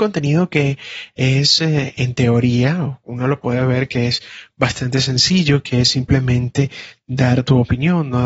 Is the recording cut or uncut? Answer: uncut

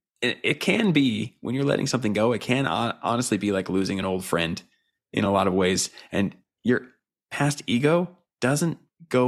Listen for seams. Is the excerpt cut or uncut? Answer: uncut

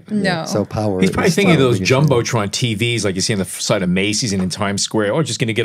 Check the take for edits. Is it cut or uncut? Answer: uncut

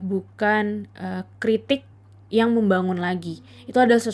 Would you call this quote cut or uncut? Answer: uncut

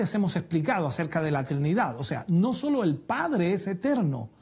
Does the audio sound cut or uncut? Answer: uncut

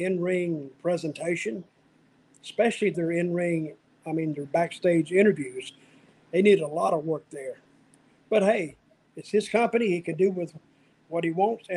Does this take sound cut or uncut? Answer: uncut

